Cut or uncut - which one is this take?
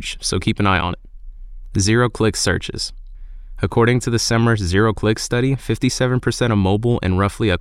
uncut